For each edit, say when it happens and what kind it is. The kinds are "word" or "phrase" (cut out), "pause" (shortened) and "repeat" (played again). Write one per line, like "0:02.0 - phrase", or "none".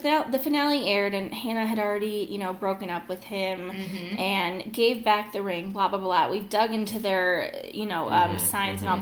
none

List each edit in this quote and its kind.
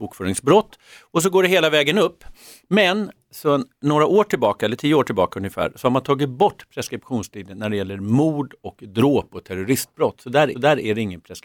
0:10.5 - repeat

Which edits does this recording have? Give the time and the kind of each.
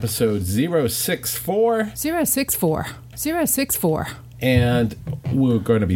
0:03.1 - repeat

